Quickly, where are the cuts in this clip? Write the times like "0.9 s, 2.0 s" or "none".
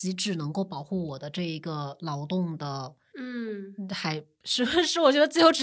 3.1 s

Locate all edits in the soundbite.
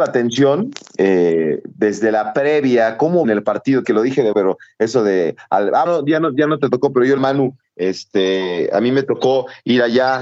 3.2 s, 3.8 s, 4.3 s, 5.9 s, 7.2 s

